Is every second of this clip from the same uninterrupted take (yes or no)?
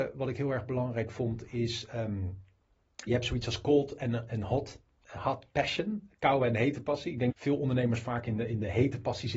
no